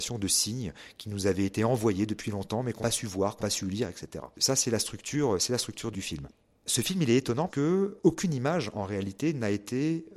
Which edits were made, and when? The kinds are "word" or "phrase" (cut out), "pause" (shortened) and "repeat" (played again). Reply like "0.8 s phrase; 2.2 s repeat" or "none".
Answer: 2.8 s word; 3.4 s word; 5.9 s word; 7.5 s word